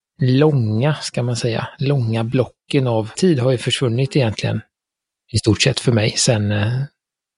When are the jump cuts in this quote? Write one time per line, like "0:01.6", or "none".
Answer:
0:03.1
0:05.0